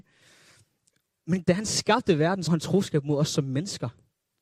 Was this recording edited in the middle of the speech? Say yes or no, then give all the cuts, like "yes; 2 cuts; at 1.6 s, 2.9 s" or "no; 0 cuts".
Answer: yes; 2 cuts; at 1.4 s, 2.5 s